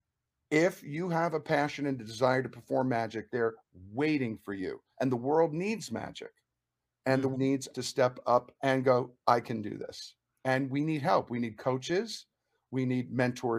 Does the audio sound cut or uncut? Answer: cut